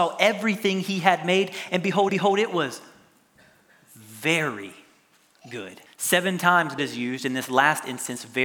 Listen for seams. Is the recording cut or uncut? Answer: cut